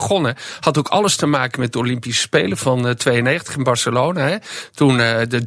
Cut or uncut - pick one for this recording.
uncut